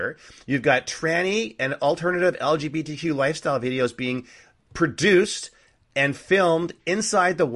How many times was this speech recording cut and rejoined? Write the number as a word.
zero